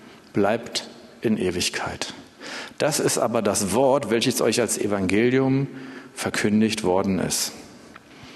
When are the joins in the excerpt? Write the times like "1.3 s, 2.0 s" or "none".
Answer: none